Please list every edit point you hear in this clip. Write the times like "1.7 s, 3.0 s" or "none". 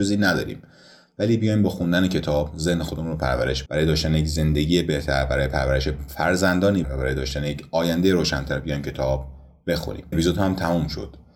3.7 s, 6.8 s, 10.1 s